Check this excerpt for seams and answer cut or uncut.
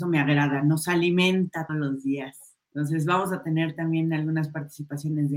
cut